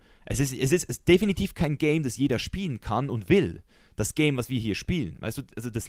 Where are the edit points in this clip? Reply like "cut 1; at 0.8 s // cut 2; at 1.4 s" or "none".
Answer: none

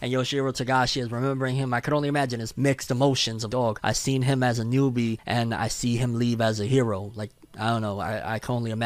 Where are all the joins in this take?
cut 1; at 2.5 s // cut 2; at 3.5 s

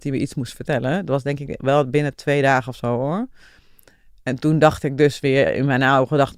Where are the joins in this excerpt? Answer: none

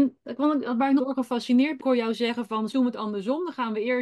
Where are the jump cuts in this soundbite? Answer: cut 1; at 1.0 s // cut 2; at 1.8 s // cut 3; at 2.7 s

